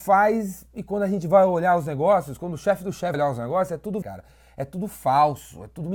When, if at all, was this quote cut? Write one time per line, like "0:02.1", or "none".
0:03.1
0:04.0